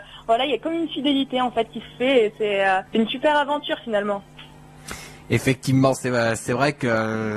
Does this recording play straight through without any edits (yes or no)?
no